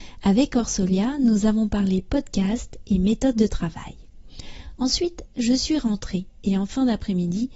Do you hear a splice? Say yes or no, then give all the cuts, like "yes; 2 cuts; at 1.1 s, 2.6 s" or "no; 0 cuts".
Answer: no; 0 cuts